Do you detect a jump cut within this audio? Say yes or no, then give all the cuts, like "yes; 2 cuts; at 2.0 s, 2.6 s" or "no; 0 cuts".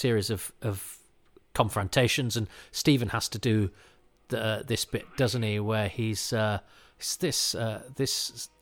no; 0 cuts